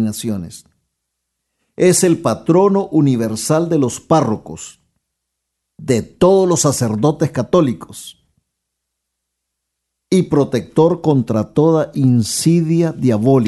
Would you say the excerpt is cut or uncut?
uncut